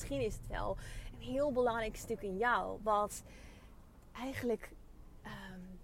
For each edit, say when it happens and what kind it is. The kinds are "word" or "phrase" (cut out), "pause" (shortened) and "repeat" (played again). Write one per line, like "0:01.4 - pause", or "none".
none